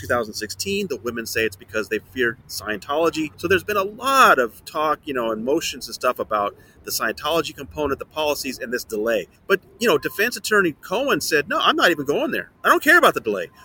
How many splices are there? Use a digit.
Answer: 3